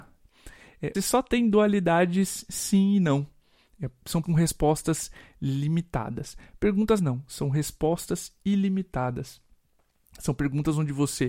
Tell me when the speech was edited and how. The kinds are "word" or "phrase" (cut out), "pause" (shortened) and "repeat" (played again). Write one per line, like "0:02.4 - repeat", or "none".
0:00.9 - word
0:04.2 - word
0:07.0 - word